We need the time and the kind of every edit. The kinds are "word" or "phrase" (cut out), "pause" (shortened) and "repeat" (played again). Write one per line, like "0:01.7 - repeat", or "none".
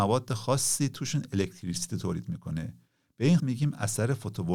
0:03.4 - word

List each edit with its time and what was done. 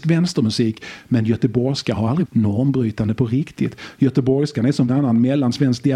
0:02.2 - word
0:04.9 - word

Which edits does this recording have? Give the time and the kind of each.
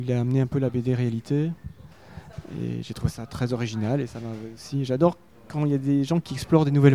none

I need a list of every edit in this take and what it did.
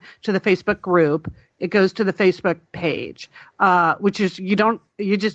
none

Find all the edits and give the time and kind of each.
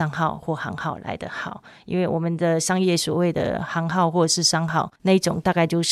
0:05.0 - pause

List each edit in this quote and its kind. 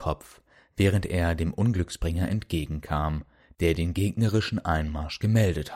none

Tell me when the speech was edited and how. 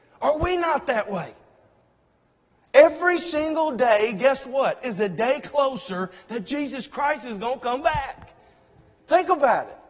none

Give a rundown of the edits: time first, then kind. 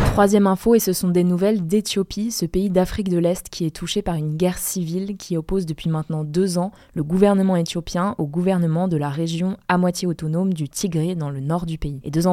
none

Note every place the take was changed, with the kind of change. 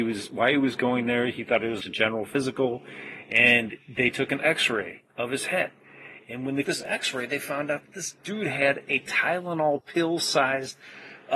0:01.8 - word
0:06.6 - word
0:08.2 - pause

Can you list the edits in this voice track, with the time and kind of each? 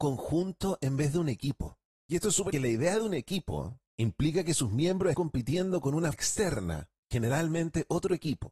0:01.9 - pause
0:02.5 - phrase
0:03.9 - pause
0:05.1 - word
0:06.1 - word

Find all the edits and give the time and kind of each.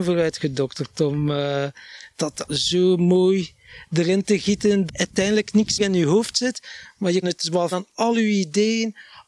0:02.5 - word
0:04.9 - word
0:05.8 - word
0:07.2 - word
0:07.7 - word

